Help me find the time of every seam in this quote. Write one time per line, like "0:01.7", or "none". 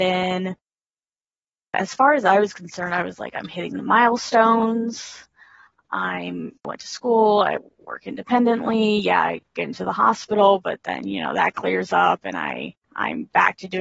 0:06.6
0:09.5
0:12.8